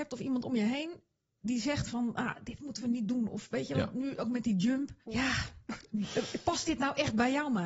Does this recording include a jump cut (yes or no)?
no